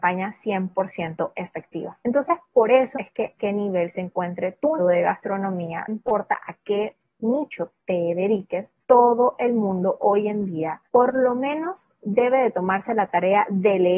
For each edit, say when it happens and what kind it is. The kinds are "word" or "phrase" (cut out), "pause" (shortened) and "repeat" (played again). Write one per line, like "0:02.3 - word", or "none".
0:02.0 - pause
0:03.0 - word
0:03.4 - phrase
0:04.8 - word
0:05.9 - word
0:07.8 - word
0:08.8 - pause
0:10.9 - pause